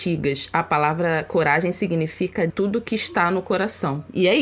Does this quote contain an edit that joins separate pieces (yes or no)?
yes